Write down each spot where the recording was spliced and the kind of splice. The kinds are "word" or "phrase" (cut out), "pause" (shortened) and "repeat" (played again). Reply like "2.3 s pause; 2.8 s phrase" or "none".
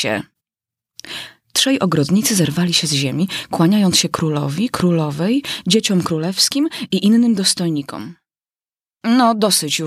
none

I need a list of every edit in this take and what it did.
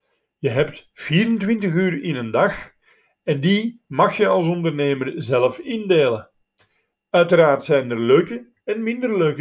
none

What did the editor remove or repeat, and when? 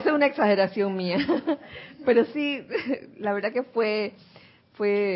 none

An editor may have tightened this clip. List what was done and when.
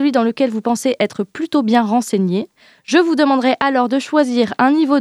none

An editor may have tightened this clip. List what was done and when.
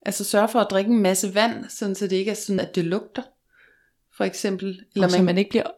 2.6 s word

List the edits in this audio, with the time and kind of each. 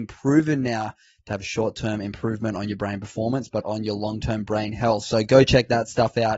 3.6 s word

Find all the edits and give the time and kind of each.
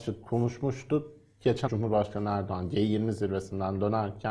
1.7 s word

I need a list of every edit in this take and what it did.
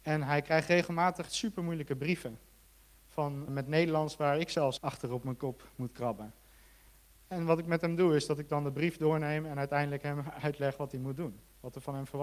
1.3 s word; 3.5 s word; 4.8 s word

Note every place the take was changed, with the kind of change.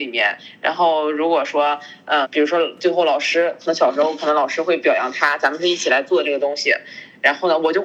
2.2 s word

